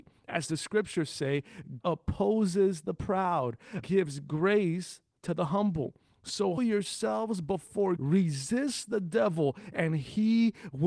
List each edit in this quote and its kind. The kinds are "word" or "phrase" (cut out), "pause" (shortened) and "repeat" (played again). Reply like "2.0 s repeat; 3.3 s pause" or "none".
1.8 s word; 3.8 s word; 6.6 s word; 8.0 s word